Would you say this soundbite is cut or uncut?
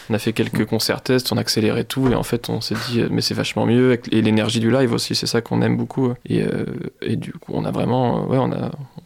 cut